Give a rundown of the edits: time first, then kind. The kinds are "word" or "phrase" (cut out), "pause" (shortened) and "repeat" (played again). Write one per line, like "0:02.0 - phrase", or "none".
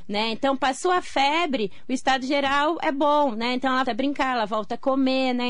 0:03.9 - word